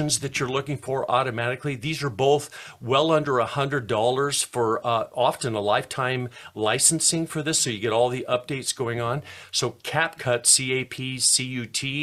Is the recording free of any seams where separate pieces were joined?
yes; 0 cuts

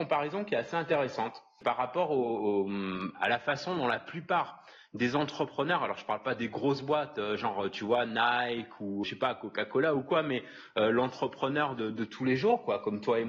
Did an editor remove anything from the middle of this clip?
yes; 1 cut; at 9.0 s

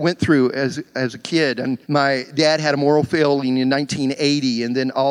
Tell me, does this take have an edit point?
yes; 1 cut; at 1.8 s

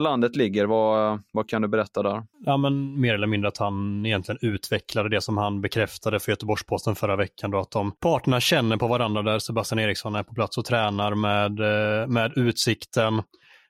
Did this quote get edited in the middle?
yes; 2 cuts; at 2.3 s, 8.0 s

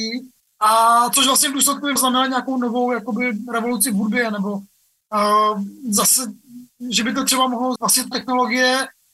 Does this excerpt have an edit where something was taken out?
yes; 3 cuts; at 2.0 s, 7.8 s, 8.1 s

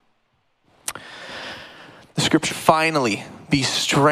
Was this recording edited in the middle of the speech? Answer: yes; 1 cut; at 2.5 s

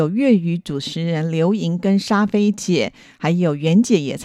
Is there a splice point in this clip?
no; 0 cuts

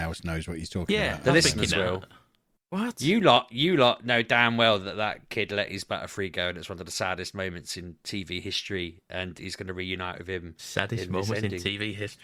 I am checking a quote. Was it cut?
no; 0 cuts

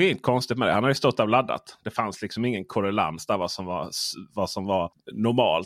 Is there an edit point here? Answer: no; 0 cuts

